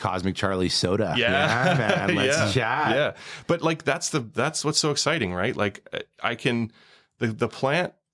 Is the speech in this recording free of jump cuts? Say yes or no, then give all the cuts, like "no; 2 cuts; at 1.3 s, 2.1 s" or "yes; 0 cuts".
yes; 0 cuts